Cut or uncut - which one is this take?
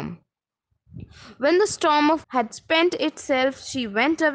cut